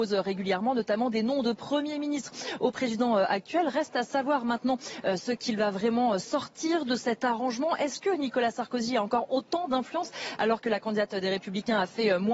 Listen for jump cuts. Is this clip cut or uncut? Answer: uncut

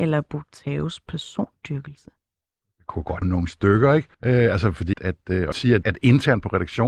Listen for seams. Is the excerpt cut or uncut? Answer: cut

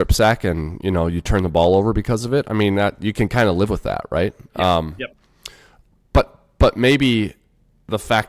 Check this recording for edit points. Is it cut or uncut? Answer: uncut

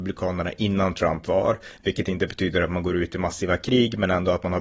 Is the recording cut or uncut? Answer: uncut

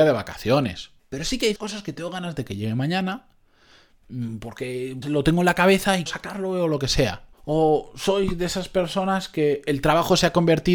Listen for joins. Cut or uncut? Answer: cut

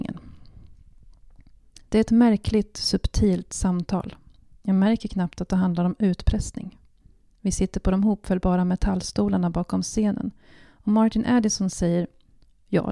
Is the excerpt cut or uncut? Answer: uncut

